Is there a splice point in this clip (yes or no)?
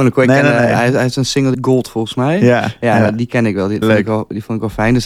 yes